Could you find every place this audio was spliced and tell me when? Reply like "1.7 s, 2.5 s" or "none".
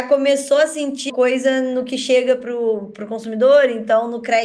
1.1 s